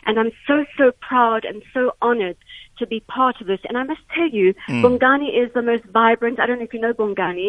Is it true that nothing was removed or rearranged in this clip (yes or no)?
yes